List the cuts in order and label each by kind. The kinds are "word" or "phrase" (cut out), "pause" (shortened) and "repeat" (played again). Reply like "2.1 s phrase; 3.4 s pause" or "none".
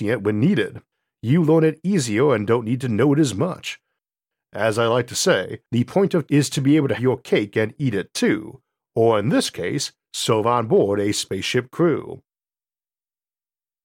6.3 s word; 7.0 s word